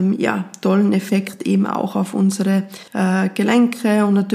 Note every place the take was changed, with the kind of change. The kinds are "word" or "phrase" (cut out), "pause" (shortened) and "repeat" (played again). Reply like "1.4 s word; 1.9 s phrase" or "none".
2.9 s pause

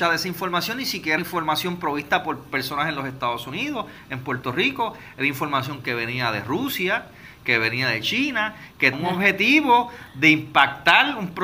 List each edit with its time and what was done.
1.2 s word; 8.9 s word

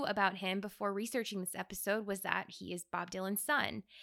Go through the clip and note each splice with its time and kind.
none

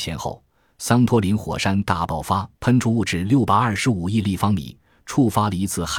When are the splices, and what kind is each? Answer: 2.5 s pause

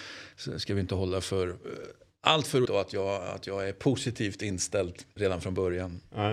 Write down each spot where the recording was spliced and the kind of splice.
2.7 s word; 5.2 s word

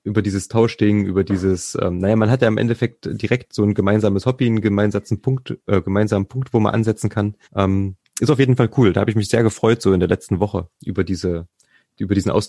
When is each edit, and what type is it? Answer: 7.4 s pause

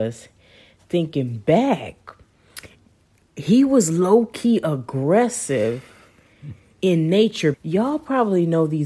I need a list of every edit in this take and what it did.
7.5 s word

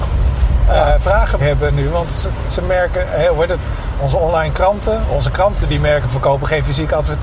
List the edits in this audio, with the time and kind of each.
1.4 s word; 3.9 s word; 5.1 s word; 6.0 s word

